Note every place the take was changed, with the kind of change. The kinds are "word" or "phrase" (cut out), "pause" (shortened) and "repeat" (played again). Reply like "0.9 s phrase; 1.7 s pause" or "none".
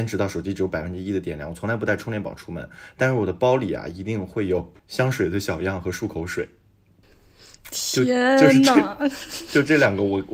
4.8 s pause